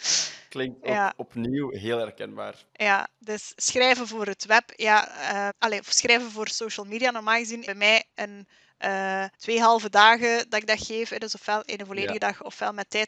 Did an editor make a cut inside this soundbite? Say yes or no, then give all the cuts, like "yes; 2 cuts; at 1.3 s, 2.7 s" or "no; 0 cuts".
yes; 4 cuts; at 2.7 s, 5.5 s, 7.7 s, 9.3 s